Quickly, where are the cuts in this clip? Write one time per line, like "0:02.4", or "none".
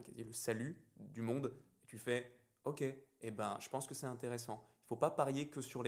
none